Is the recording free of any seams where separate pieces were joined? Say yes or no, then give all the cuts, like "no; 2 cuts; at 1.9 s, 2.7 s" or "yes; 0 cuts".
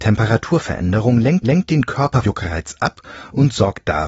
no; 2 cuts; at 1.4 s, 2.2 s